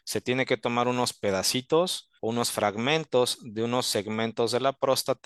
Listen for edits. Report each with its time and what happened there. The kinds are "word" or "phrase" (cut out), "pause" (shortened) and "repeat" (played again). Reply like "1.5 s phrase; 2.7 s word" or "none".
2.2 s pause